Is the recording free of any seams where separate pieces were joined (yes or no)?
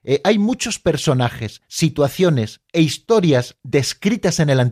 yes